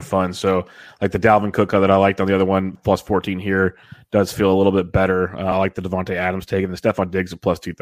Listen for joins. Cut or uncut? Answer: uncut